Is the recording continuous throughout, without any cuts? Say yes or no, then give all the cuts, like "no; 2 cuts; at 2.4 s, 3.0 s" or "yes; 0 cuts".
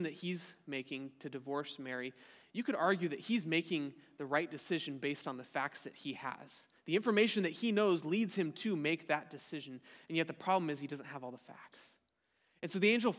yes; 0 cuts